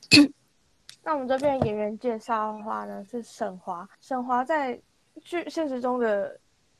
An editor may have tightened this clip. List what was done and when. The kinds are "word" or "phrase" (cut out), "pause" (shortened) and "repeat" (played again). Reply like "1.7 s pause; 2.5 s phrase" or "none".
3.9 s pause